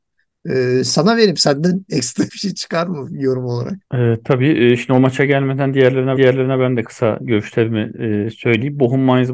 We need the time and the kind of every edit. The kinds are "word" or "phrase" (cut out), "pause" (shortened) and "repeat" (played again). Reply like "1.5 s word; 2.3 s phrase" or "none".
2.3 s word; 3.8 s pause; 6.2 s repeat; 6.8 s word